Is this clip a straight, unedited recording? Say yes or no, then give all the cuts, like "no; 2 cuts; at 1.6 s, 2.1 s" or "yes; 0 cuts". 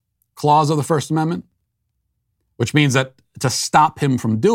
yes; 0 cuts